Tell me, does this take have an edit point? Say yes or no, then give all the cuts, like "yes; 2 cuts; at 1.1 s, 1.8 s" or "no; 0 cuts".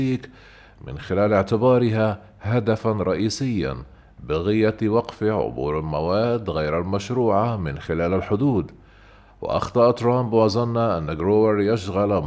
no; 0 cuts